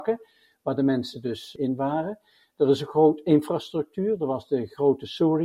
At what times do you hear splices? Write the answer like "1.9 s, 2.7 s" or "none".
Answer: none